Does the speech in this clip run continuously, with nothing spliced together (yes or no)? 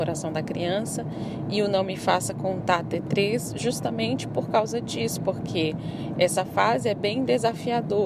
yes